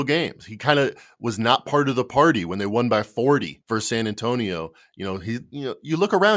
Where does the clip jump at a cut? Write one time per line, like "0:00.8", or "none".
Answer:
0:03.6